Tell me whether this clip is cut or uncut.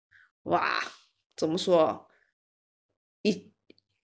uncut